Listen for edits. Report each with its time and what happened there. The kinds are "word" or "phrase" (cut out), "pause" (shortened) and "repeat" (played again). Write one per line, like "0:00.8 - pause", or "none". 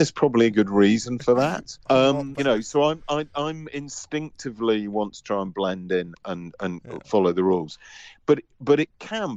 0:01.8 - pause
0:02.4 - word
0:06.1 - word